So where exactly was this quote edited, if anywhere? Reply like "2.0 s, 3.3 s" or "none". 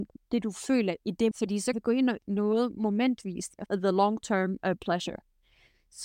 1.3 s, 1.7 s, 2.2 s, 3.7 s